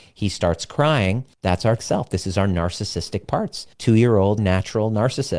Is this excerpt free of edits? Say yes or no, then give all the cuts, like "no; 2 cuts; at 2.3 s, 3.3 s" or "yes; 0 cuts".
no; 4 cuts; at 1.3 s, 1.8 s, 3.7 s, 4.4 s